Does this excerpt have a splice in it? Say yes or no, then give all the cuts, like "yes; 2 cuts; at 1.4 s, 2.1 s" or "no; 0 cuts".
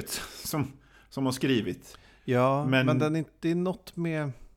no; 0 cuts